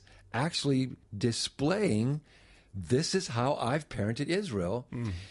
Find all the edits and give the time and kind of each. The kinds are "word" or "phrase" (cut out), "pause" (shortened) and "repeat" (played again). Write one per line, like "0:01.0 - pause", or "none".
none